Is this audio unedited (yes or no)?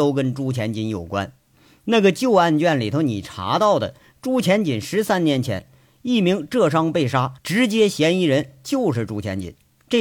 no